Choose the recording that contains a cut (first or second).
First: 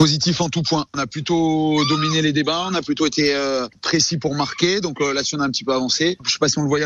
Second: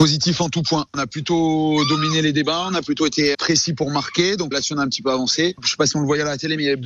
second